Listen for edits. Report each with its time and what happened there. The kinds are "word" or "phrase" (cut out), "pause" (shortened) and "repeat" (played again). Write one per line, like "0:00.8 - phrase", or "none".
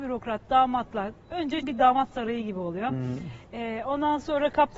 0:01.6 - word